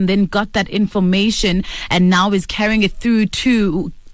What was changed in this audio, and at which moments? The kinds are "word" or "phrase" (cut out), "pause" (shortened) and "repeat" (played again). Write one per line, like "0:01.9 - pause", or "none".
none